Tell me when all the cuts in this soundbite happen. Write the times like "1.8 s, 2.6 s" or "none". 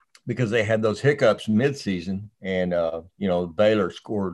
2.3 s, 3.1 s